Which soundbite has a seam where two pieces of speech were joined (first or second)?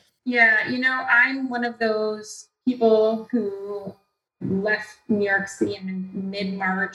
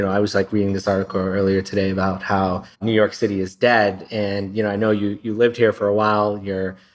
second